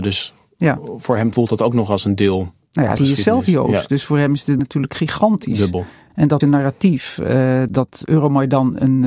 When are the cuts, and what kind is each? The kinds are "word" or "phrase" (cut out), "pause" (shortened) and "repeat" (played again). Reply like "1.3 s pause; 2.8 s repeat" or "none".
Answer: 3.0 s word; 4.6 s word; 6.4 s word; 7.7 s word